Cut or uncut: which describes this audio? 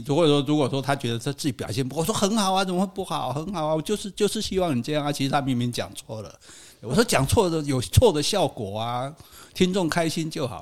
uncut